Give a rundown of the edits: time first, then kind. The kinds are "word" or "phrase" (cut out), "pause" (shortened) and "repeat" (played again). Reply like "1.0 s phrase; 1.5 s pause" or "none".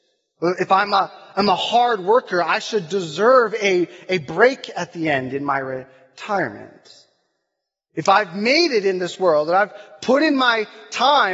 none